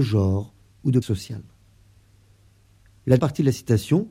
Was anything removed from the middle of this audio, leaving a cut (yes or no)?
yes